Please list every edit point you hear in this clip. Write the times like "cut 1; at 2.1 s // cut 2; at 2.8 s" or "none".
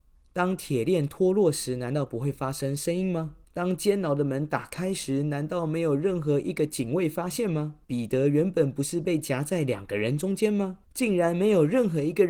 cut 1; at 3.4 s // cut 2; at 7.8 s // cut 3; at 10.8 s